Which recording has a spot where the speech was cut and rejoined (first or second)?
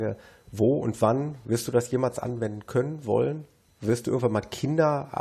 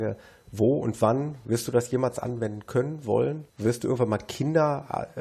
second